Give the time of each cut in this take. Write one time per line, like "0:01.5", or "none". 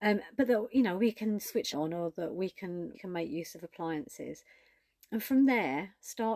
0:01.7
0:02.9